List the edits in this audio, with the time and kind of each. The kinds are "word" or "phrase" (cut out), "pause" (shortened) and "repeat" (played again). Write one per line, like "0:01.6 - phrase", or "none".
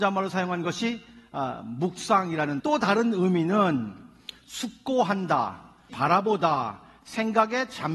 0:02.6 - word
0:05.9 - word